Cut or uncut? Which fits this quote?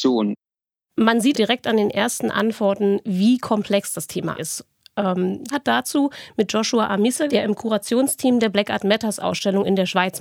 cut